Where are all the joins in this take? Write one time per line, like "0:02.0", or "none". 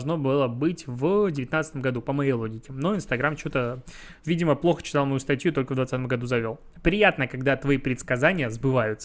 0:04.2